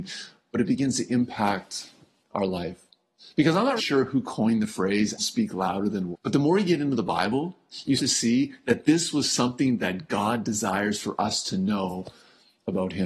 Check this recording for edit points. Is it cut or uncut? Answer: cut